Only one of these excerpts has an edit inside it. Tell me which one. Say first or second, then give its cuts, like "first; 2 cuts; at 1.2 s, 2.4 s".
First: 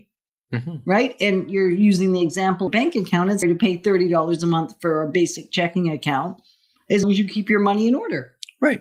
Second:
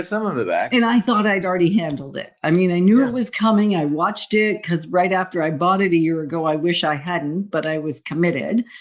first; 3 cuts; at 2.7 s, 3.4 s, 7.0 s